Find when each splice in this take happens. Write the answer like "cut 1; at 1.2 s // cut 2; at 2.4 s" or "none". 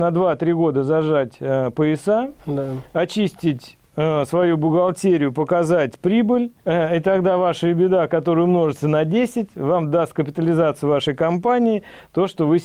cut 1; at 3.9 s // cut 2; at 6.6 s

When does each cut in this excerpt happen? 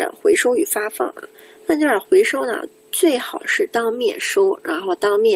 none

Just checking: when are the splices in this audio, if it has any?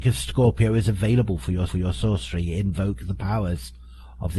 cut 1; at 1.7 s

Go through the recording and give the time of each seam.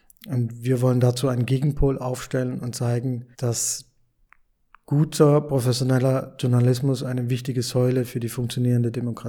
cut 1; at 3.3 s

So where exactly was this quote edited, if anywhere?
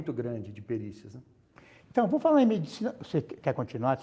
none

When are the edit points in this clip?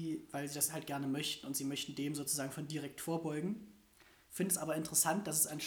none

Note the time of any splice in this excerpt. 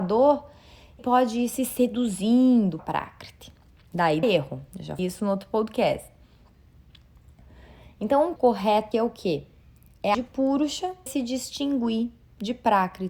cut 1; at 1.0 s // cut 2; at 2.8 s // cut 3; at 4.2 s // cut 4; at 5.0 s // cut 5; at 8.4 s // cut 6; at 8.9 s // cut 7; at 10.1 s // cut 8; at 11.1 s

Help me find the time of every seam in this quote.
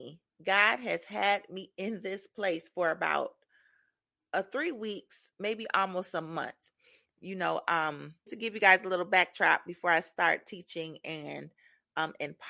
cut 1; at 8.3 s

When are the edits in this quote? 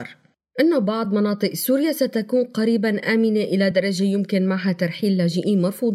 none

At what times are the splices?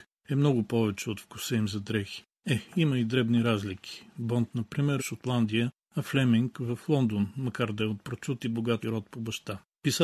cut 1; at 5.0 s // cut 2; at 8.8 s

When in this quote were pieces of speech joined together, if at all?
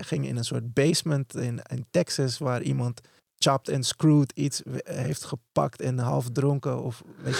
cut 1; at 3.2 s

